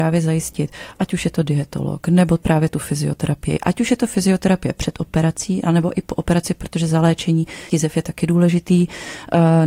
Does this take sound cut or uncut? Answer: cut